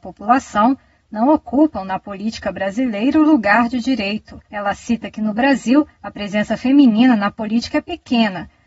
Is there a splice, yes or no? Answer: yes